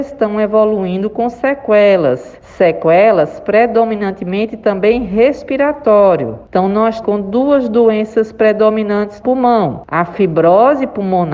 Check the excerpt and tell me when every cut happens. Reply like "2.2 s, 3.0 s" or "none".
7.0 s, 9.2 s